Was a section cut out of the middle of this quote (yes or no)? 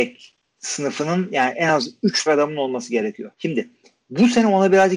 yes